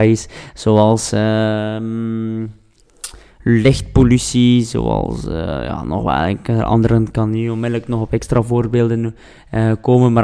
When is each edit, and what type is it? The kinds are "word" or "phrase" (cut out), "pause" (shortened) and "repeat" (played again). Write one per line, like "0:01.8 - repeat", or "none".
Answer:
none

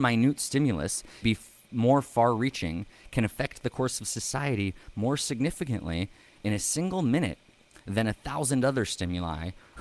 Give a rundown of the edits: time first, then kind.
0:01.2 - word

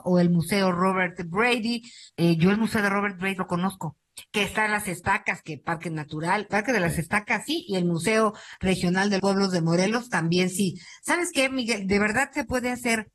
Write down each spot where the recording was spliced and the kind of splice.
0:02.1 - pause
0:03.4 - word
0:06.5 - word
0:09.2 - word

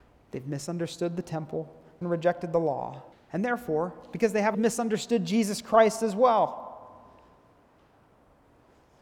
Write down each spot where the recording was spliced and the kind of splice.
0:02.0 - phrase
0:03.1 - pause
0:04.5 - phrase

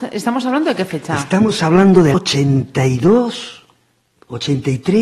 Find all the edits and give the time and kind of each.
0:02.1 - word

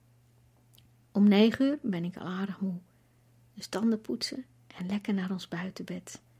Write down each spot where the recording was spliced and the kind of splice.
none

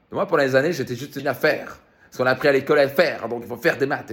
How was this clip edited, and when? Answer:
0:01.2 - word

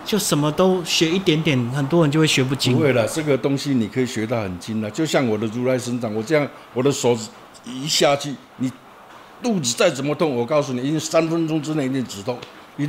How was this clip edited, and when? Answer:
none

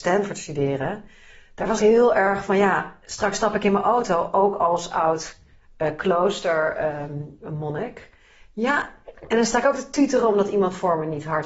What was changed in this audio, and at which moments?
0:01.8 - phrase

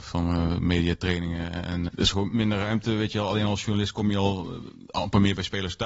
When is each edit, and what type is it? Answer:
0:01.9 - word

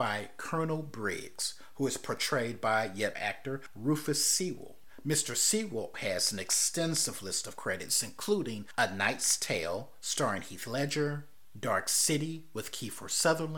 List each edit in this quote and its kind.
0:03.1 - phrase
0:05.9 - word

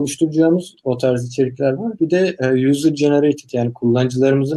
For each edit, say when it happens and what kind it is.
none

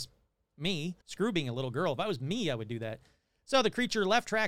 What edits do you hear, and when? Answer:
0:01.0 - pause

